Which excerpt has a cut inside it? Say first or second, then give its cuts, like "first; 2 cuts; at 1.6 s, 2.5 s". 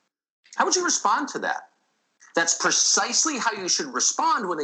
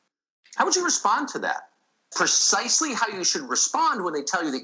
second; 1 cut; at 2.1 s